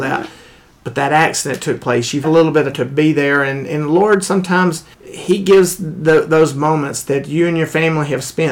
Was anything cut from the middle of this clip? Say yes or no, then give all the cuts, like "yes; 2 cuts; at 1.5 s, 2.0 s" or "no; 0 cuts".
yes; 3 cuts; at 2.2 s, 2.7 s, 4.9 s